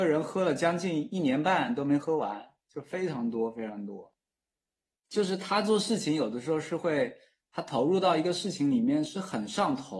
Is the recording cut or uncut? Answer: uncut